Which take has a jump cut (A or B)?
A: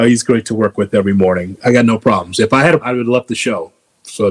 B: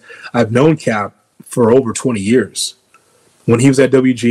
A